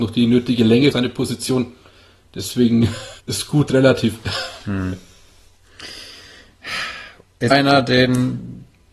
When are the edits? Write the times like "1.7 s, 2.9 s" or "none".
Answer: 0.9 s, 3.2 s, 7.5 s